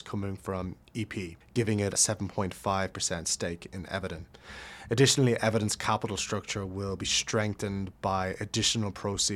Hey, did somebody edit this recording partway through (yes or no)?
yes